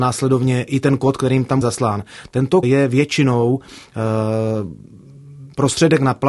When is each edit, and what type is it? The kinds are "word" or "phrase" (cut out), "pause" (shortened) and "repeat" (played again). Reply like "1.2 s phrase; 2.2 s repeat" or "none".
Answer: 1.6 s word; 2.6 s word